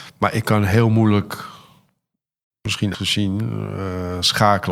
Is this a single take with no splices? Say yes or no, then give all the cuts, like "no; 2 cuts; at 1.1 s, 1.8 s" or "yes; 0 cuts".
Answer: no; 1 cut; at 2.9 s